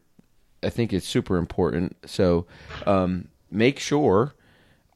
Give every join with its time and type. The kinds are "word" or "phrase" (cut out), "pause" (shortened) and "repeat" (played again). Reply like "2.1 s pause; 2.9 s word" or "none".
2.0 s pause